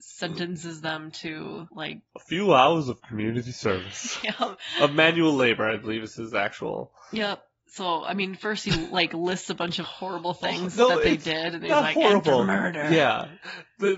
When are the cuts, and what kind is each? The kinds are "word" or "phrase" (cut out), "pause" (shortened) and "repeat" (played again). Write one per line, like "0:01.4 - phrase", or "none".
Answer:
0:09.8 - word